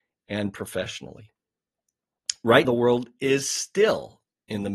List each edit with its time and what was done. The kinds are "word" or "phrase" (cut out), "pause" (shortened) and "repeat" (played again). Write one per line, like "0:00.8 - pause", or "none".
0:02.6 - word